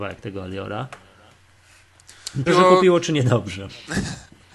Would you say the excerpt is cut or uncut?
cut